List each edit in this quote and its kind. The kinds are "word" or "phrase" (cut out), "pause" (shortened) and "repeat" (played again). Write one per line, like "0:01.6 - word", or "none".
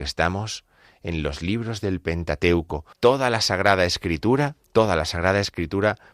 0:02.9 - pause
0:04.6 - pause